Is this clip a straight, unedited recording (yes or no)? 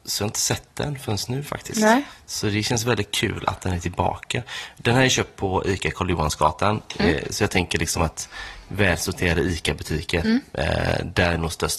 yes